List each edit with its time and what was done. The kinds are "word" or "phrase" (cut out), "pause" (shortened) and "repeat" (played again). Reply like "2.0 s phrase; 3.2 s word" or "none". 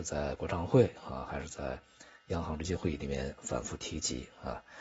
none